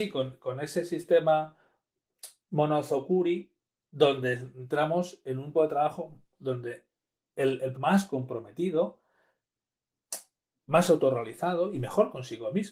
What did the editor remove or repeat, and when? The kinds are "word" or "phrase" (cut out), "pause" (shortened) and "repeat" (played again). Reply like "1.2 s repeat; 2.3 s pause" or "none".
5.5 s word; 7.7 s phrase